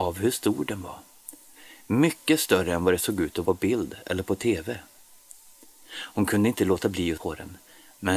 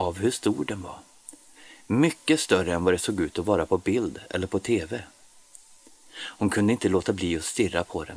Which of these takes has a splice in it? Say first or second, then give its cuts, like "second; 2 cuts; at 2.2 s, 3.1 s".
first; 2 cuts; at 3.4 s, 7.2 s